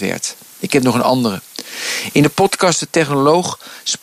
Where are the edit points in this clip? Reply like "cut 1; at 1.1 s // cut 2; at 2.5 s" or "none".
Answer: none